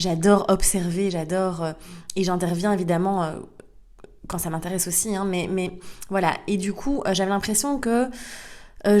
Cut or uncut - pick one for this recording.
uncut